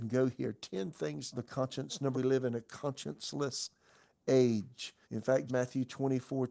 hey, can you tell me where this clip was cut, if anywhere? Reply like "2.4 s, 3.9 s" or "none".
1.3 s, 2.1 s, 5.0 s, 5.5 s